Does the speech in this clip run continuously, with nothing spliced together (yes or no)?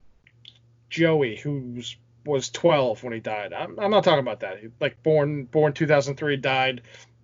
yes